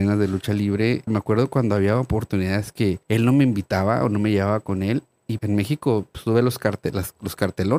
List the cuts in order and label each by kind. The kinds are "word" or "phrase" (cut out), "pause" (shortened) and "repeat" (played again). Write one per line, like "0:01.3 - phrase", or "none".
0:01.1 - phrase
0:03.0 - pause
0:05.4 - word